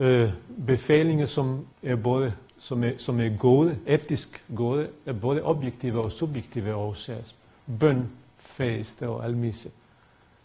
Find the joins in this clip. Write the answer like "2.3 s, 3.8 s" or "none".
1.7 s, 2.5 s